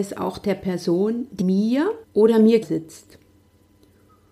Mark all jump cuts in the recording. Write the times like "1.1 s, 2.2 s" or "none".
1.4 s, 2.0 s, 2.6 s